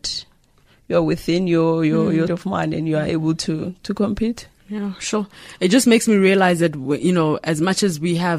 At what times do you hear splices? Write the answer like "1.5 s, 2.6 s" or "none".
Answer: 2.3 s